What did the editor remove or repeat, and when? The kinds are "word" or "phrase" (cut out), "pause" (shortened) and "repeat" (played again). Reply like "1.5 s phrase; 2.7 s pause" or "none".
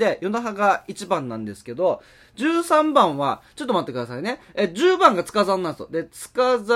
none